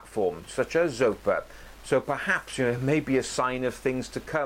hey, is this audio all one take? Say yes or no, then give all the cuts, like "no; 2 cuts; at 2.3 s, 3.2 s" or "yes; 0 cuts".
yes; 0 cuts